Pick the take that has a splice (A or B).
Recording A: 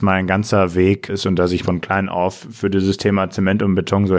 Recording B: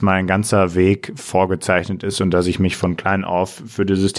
A